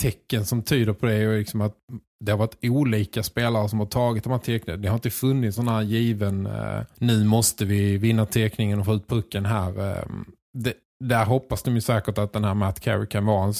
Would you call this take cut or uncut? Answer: cut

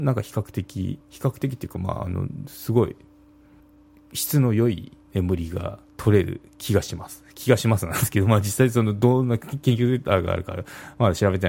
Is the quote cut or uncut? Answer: cut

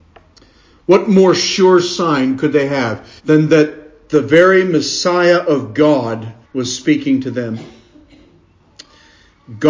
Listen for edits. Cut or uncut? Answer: cut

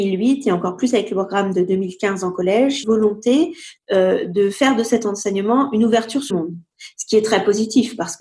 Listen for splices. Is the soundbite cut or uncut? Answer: cut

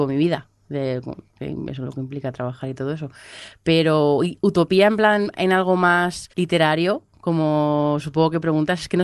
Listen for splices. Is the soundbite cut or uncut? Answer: cut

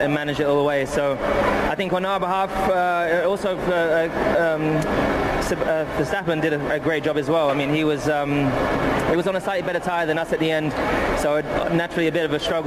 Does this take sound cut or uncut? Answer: uncut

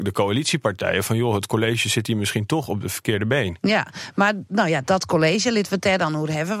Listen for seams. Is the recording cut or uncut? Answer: uncut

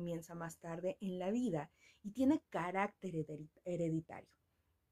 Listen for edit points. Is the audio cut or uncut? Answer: uncut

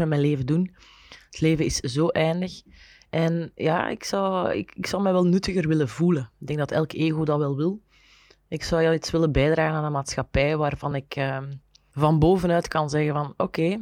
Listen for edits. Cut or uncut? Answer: uncut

